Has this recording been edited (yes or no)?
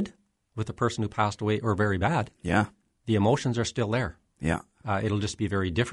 no